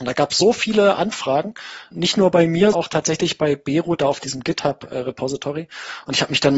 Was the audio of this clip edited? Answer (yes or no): yes